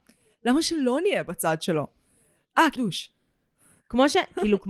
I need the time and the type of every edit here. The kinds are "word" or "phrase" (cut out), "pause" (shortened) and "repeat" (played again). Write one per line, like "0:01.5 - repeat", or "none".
0:02.8 - word